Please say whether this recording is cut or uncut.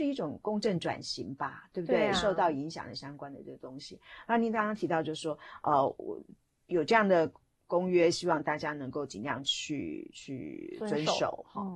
uncut